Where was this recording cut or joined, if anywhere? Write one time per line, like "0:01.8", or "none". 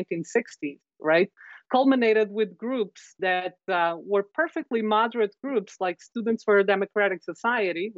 none